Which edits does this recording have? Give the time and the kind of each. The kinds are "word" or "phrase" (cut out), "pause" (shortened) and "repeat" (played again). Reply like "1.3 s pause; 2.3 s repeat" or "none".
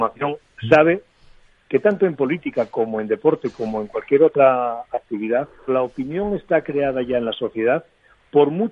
5.7 s word